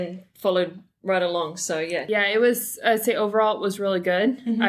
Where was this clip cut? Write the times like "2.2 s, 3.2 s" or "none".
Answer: none